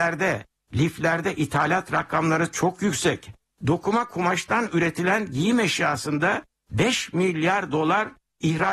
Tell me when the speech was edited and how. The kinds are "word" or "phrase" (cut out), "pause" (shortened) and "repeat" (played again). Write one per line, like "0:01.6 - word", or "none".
none